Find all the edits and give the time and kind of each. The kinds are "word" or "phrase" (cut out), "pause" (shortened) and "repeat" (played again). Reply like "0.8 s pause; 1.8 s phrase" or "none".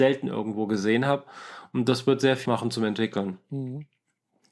2.5 s word